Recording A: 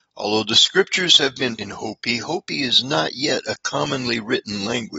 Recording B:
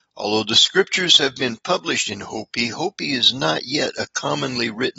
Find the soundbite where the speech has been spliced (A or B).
A